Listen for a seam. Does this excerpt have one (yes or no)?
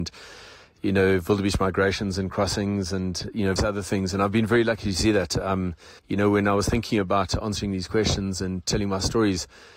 yes